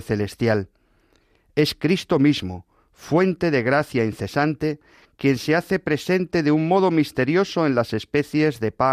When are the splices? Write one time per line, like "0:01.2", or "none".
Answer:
none